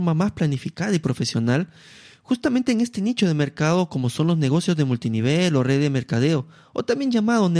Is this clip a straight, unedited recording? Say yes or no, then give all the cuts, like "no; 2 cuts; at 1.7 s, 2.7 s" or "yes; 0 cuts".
yes; 0 cuts